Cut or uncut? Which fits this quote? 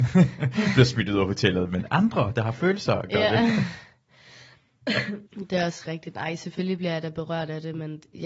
cut